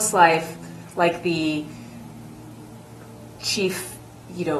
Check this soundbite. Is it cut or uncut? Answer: uncut